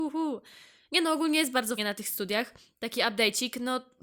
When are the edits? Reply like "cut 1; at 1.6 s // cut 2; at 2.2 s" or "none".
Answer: cut 1; at 1.8 s